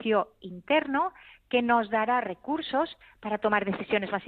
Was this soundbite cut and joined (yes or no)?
no